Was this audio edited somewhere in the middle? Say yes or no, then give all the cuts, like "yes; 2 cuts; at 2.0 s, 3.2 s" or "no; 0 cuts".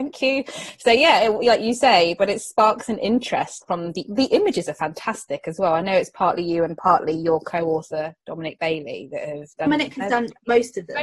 yes; 1 cut; at 3.6 s